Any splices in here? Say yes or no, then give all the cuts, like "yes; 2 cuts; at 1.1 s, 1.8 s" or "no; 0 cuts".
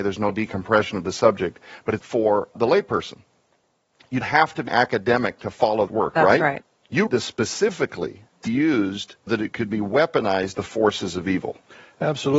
yes; 9 cuts; at 2.0 s, 2.5 s, 4.2 s, 4.7 s, 5.9 s, 7.1 s, 8.5 s, 9.3 s, 10.5 s